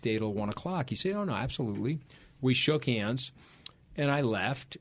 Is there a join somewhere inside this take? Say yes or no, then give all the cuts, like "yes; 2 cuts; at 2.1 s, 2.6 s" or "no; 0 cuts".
no; 0 cuts